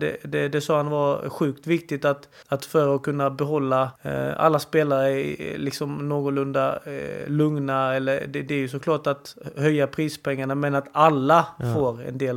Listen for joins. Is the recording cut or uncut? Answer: cut